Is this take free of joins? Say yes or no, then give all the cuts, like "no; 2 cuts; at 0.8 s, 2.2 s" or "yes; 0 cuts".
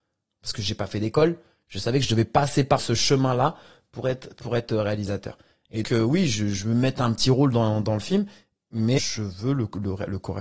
no; 3 cuts; at 2.8 s, 5.8 s, 9.0 s